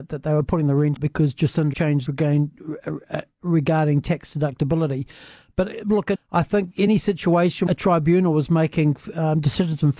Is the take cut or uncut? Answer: cut